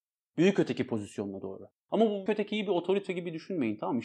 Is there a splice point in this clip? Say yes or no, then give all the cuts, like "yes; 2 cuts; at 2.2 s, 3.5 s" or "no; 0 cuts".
yes; 1 cut; at 2.3 s